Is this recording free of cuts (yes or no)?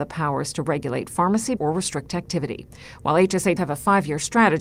no